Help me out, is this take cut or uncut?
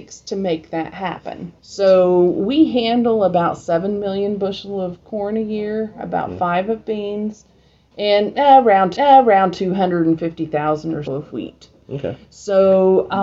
cut